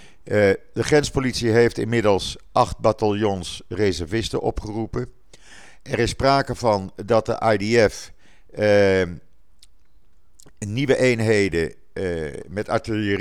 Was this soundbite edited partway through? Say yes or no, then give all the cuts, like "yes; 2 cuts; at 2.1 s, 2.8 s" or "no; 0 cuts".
no; 0 cuts